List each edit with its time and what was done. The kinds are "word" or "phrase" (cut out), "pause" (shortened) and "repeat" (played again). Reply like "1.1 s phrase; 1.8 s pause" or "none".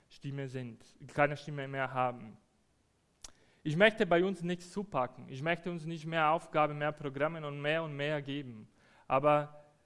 none

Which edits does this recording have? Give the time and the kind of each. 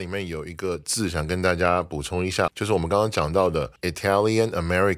2.5 s word; 3.8 s pause

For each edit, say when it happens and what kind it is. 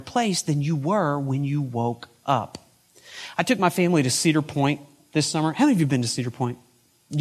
none

